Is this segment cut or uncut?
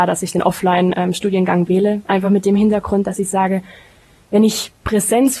uncut